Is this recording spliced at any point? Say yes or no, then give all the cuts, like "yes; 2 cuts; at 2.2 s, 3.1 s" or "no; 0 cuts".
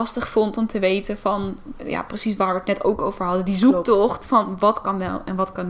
no; 0 cuts